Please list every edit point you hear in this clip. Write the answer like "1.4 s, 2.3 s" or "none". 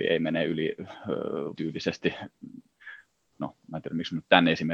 1.5 s